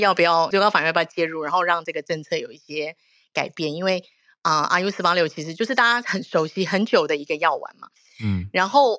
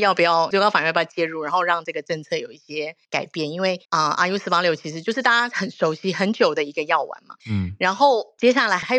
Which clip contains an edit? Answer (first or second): second